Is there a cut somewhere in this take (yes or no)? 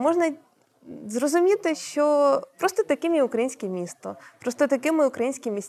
no